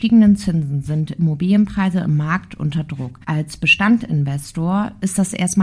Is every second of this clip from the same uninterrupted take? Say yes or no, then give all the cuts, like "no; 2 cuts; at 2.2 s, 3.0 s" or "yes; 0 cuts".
no; 1 cut; at 3.2 s